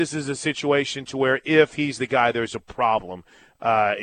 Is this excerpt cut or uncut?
uncut